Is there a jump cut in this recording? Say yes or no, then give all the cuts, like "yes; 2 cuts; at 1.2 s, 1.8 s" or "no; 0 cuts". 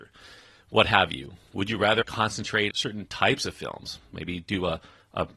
yes; 2 cuts; at 2.0 s, 2.7 s